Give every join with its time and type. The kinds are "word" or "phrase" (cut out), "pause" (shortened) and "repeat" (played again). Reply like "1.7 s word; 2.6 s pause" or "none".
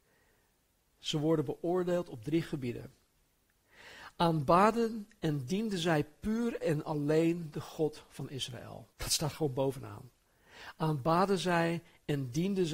8.9 s pause